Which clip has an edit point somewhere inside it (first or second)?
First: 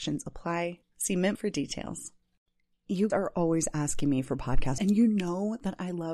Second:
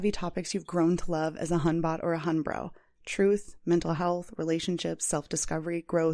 first